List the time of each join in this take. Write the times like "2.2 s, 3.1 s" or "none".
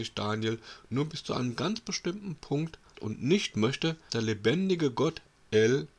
2.9 s, 4.1 s